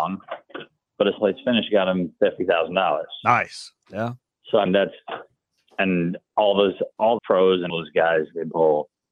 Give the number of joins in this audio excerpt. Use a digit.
6